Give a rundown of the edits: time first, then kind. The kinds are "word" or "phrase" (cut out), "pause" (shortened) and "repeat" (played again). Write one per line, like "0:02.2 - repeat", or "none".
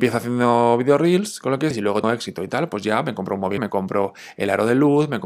0:01.7 - word
0:02.0 - word
0:03.6 - word

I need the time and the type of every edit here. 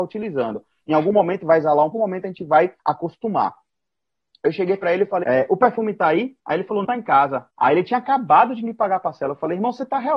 0:01.9 - phrase
0:02.8 - pause
0:05.2 - word
0:06.4 - pause
0:06.8 - word
0:07.5 - pause

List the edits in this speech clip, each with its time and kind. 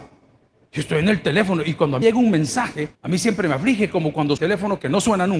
0:02.0 - word
0:02.9 - pause
0:04.4 - phrase

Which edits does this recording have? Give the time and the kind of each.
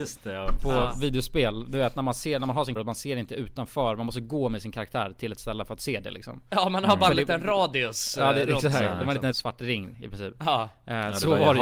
0:02.8 - word
0:09.3 - word

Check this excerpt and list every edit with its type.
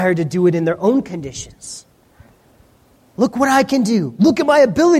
none

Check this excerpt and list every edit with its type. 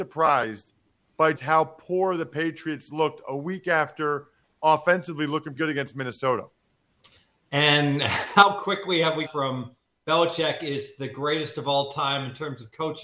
0:01.3 - word
0:05.6 - word
0:09.3 - word

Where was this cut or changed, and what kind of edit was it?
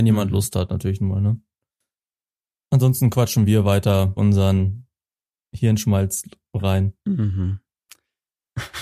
0:04.2 - phrase

